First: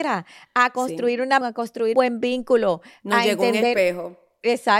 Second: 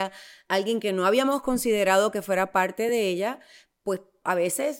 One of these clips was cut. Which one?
first; 2 cuts; at 1.4 s, 1.9 s

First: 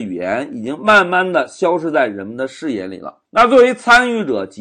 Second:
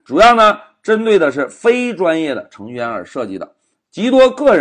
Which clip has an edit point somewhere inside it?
first; 1 cut; at 3.3 s

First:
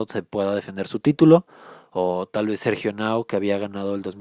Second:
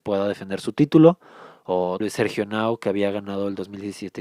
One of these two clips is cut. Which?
second; 1 cut; at 2.0 s

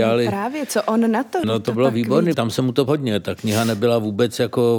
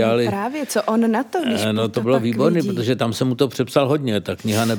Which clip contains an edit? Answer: first; 3 cuts; at 1.4 s, 2.3 s, 2.9 s

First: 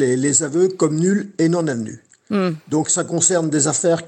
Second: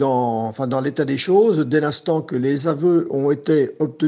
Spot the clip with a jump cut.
first; 1 cut; at 2.8 s

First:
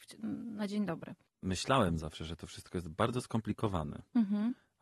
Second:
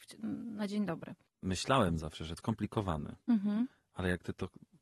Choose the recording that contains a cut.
second; 1 cut; at 2.4 s

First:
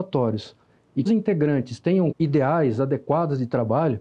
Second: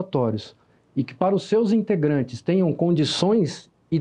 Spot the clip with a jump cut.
first; 2 cuts; at 1.1 s, 2.1 s

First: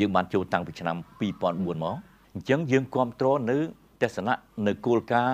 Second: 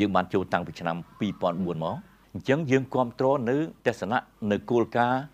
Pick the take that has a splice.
second; 1 cut; at 3.8 s

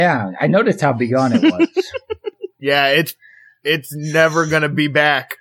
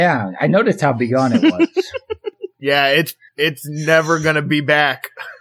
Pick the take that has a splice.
second; 1 cut; at 3.3 s

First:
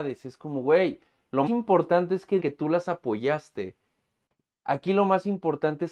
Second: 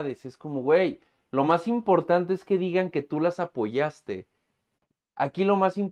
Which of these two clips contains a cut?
first; 2 cuts; at 1.5 s, 2.4 s

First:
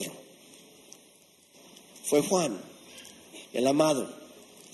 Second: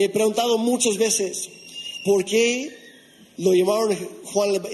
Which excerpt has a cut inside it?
first; 1 cut; at 3.4 s

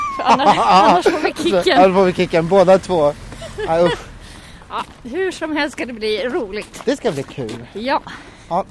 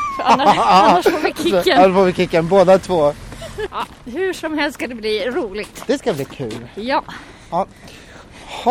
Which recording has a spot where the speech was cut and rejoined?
second; 1 cut; at 3.7 s

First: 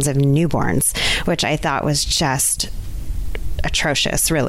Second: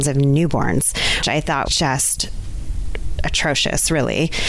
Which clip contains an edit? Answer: second; 2 cuts; at 1.2 s, 1.7 s

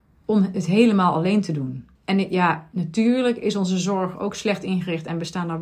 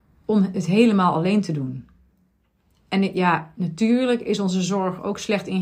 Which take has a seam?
first; 1 cut; at 2.0 s

